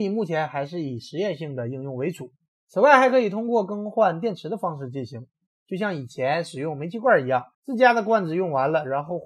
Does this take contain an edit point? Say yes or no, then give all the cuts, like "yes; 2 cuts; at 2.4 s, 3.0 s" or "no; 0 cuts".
yes; 2 cuts; at 2.5 s, 7.5 s